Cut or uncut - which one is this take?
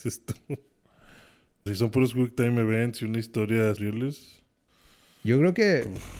cut